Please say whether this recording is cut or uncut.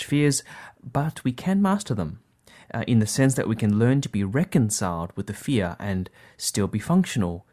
uncut